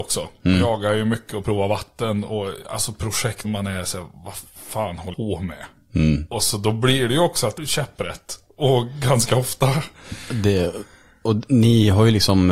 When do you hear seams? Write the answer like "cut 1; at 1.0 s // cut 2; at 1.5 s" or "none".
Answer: cut 1; at 3.4 s // cut 2; at 5.1 s // cut 3; at 7.6 s